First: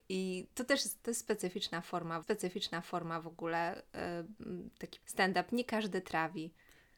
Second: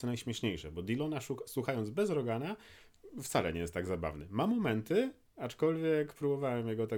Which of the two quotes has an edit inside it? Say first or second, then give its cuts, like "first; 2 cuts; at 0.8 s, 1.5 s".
first; 2 cuts; at 2.2 s, 5.0 s